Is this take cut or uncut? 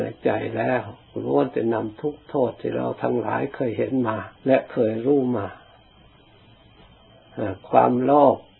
cut